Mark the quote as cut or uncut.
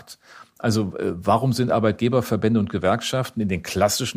uncut